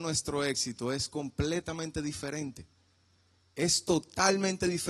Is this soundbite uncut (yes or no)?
yes